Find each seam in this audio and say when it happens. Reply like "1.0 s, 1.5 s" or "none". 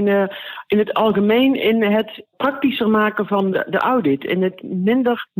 3.5 s